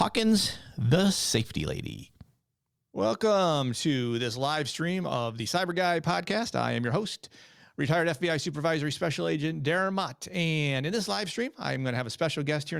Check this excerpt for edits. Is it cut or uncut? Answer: uncut